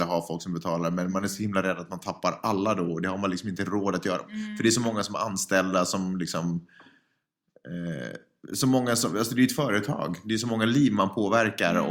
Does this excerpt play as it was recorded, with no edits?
yes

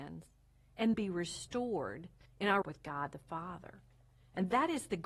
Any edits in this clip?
yes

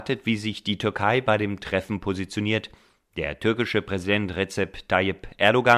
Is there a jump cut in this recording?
no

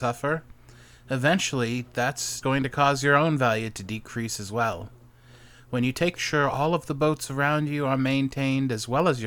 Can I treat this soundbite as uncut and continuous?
no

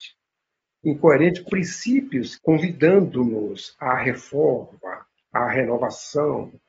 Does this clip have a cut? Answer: yes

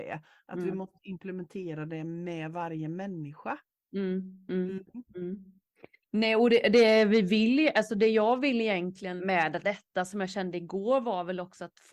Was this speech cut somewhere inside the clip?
yes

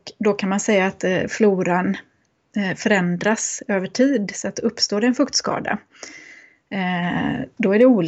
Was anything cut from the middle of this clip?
no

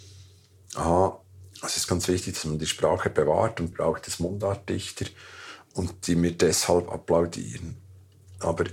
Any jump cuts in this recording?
yes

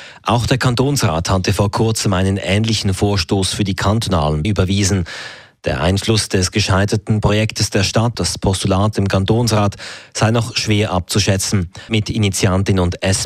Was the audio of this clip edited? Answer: yes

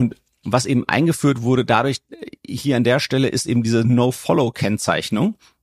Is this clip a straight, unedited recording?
yes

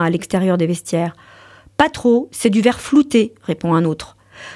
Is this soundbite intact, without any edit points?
yes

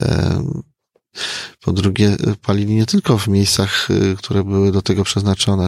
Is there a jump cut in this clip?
no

